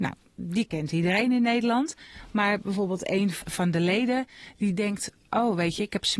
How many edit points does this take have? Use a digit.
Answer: 0